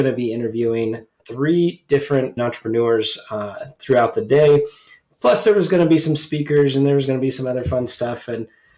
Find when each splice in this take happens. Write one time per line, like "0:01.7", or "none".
0:01.2
0:02.4